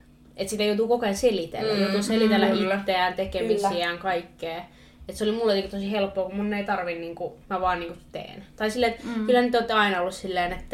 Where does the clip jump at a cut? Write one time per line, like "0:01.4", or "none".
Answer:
0:07.4
0:08.1

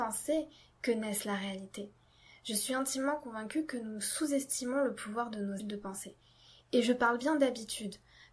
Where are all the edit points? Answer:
0:05.6

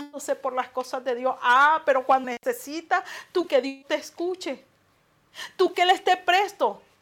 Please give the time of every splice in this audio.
0:02.2
0:03.5
0:05.7

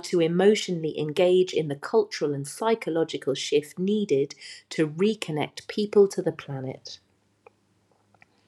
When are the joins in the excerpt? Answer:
none

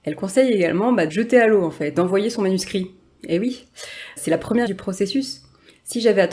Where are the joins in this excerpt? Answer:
0:01.1
0:01.9
0:04.2
0:04.7

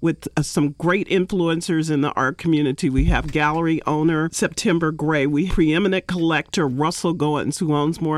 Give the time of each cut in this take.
0:05.5

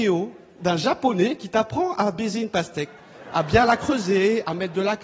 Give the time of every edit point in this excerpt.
none

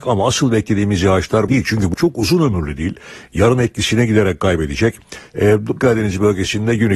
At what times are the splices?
0:01.5
0:01.9
0:05.8

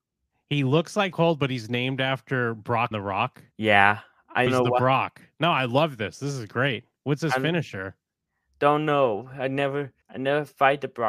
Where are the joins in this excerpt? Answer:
0:01.1
0:02.9
0:03.5
0:04.5
0:10.0

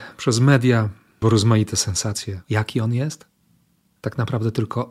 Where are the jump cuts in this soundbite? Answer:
0:01.2
0:02.4

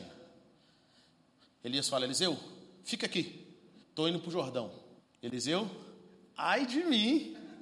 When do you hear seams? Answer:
0:03.8
0:05.0

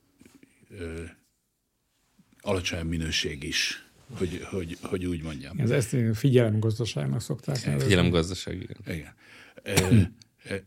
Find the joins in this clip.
none

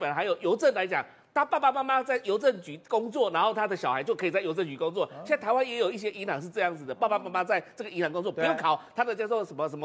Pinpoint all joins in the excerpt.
none

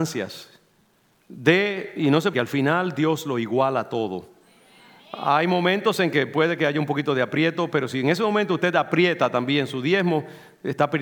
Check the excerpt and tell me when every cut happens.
0:02.3

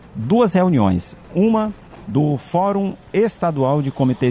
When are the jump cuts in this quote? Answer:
0:01.2

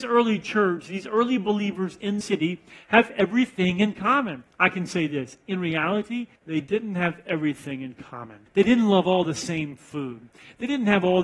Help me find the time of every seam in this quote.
0:02.2
0:04.5
0:06.4
0:08.5

